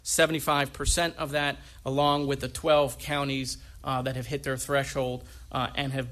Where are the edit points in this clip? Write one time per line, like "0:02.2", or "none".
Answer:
none